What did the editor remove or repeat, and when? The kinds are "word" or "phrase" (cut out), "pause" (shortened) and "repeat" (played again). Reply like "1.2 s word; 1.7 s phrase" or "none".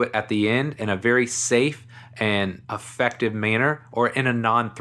2.6 s pause